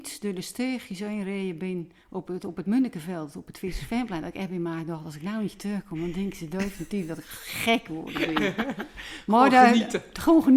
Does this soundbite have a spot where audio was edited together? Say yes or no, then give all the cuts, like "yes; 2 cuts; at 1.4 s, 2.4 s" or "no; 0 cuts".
yes; 1 cut; at 2.0 s